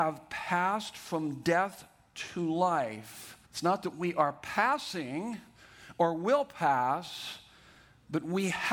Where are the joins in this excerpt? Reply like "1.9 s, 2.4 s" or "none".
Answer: 3.4 s

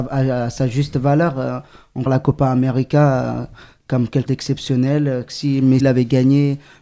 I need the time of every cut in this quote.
2.1 s, 4.3 s, 5.8 s

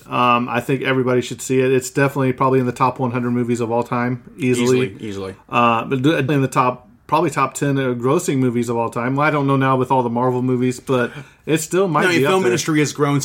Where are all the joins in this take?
6.3 s

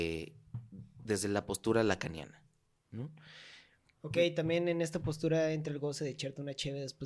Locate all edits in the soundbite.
none

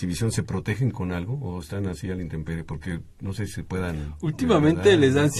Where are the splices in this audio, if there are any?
none

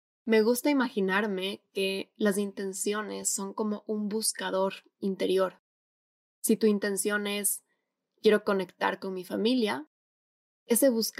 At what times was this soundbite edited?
none

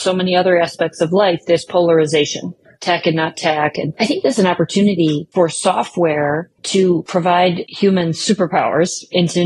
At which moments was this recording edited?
none

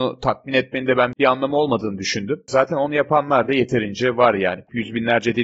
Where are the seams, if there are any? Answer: none

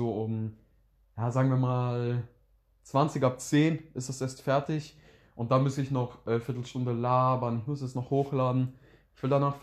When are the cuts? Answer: none

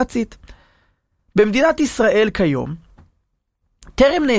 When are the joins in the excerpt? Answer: none

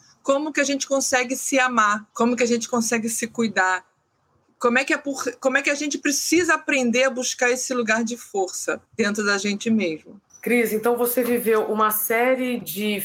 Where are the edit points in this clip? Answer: 2.1 s, 8.9 s, 10.3 s

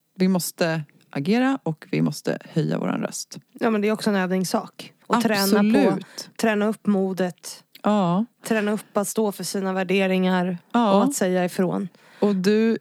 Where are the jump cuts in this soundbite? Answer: 3.5 s, 5.0 s

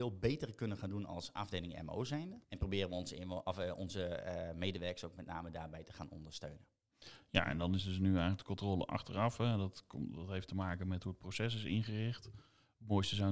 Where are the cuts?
2.4 s

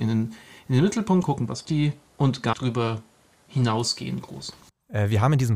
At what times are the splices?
1.2 s, 1.6 s, 2.5 s

